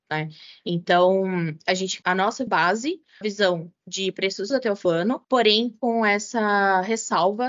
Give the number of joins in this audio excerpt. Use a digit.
6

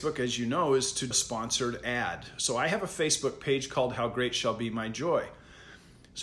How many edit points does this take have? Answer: 1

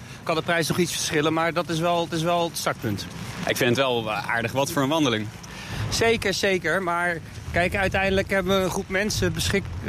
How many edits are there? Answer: 1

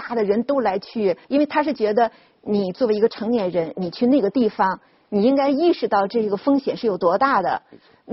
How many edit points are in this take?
1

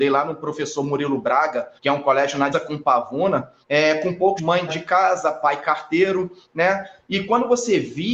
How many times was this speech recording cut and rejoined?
6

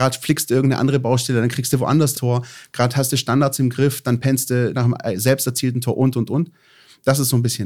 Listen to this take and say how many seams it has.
2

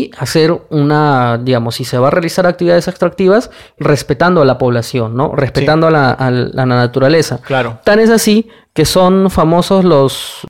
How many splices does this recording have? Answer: 1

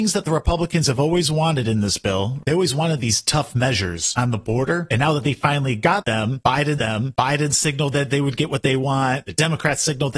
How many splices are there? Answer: 1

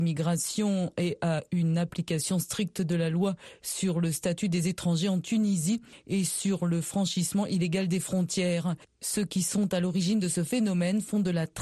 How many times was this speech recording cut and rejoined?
0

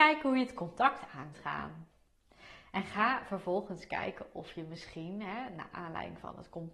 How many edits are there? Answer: 1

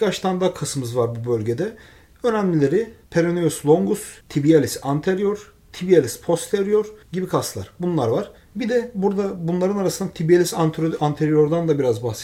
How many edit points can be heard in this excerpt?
4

